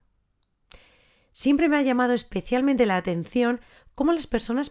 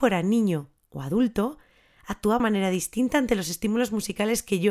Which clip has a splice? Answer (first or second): second